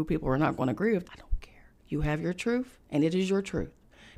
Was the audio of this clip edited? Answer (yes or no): yes